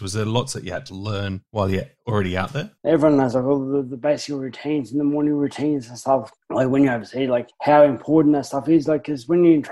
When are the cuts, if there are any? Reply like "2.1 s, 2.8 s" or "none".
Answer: 2.8 s